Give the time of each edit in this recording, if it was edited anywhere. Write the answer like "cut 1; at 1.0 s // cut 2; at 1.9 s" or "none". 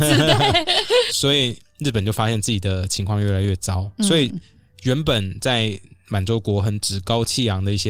cut 1; at 1.1 s